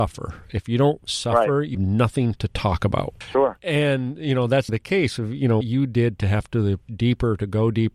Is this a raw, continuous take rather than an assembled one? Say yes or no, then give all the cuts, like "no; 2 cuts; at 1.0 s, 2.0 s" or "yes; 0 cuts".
no; 4 cuts; at 1.7 s, 4.7 s, 5.6 s, 6.9 s